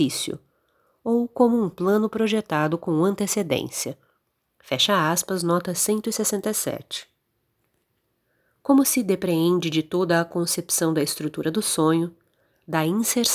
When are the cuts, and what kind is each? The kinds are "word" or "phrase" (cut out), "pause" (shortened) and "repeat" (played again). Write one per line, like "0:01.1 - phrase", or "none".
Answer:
none